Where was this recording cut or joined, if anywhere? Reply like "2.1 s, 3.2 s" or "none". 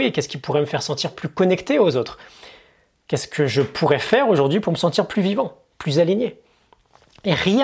none